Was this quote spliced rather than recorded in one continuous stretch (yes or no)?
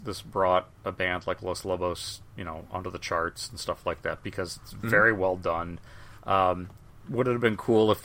no